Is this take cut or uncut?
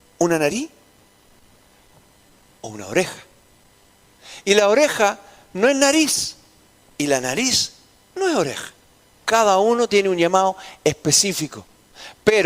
uncut